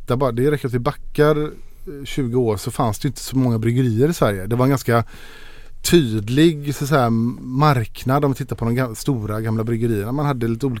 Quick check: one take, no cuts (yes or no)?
yes